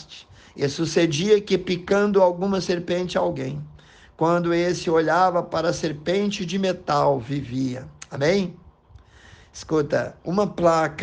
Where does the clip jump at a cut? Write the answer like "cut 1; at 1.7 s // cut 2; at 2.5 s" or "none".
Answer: none